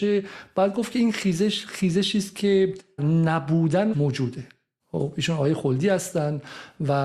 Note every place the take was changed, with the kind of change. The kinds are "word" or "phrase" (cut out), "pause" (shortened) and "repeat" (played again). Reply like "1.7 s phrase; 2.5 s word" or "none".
3.0 s word; 3.9 s phrase